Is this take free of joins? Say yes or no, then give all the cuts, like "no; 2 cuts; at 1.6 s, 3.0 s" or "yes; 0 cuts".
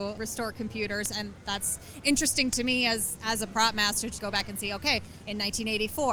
no; 1 cut; at 4.2 s